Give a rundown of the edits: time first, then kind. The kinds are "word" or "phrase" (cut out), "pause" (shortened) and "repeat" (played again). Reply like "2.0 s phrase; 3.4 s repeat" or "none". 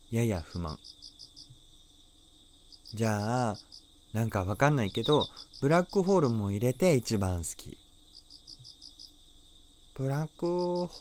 none